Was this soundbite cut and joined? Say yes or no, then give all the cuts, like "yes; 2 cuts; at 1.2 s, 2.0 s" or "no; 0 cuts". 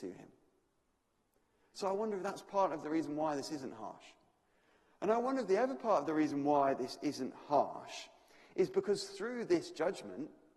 no; 0 cuts